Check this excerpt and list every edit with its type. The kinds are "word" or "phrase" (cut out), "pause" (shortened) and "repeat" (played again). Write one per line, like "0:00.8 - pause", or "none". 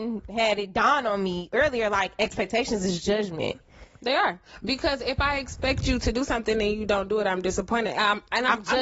none

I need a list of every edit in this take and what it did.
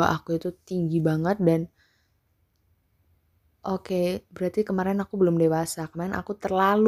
none

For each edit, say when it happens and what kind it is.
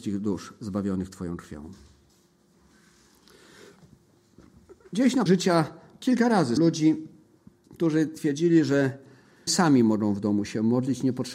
0:05.3 - word
0:06.6 - word
0:09.5 - word

